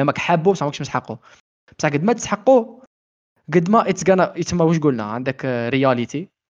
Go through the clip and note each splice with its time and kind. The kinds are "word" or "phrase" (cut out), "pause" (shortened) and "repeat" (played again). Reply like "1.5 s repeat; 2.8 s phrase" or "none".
none